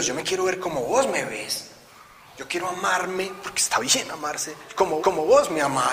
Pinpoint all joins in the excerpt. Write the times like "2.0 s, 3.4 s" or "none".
5.0 s